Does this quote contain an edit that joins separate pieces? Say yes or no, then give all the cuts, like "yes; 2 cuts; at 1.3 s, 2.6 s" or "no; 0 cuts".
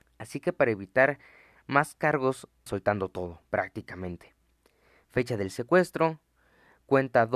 yes; 1 cut; at 2.7 s